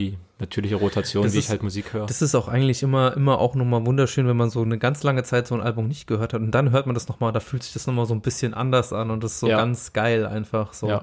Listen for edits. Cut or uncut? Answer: uncut